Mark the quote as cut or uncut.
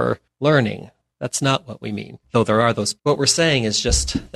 cut